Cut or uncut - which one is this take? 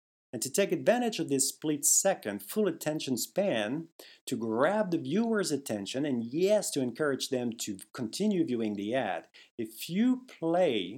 uncut